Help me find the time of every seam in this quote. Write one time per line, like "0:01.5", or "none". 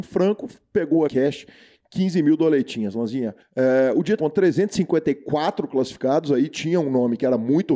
0:01.1
0:04.2